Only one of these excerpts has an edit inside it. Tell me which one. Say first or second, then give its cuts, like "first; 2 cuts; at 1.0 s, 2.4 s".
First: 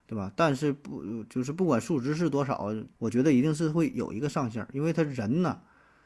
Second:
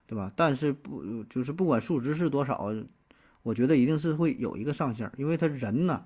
first; 1 cut; at 2.9 s